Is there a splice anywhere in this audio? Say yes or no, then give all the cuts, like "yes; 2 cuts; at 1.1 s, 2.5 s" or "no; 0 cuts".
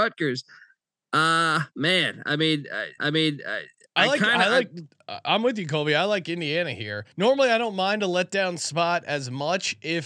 yes; 3 cuts; at 1.7 s, 3.0 s, 7.1 s